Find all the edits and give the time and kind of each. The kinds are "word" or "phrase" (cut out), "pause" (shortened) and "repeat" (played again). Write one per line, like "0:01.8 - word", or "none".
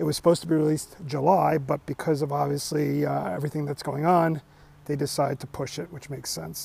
none